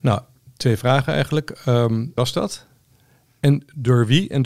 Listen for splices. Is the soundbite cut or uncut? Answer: cut